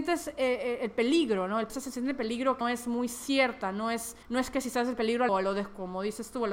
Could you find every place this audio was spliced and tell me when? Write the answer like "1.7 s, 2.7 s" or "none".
1.7 s, 2.6 s, 4.2 s, 5.3 s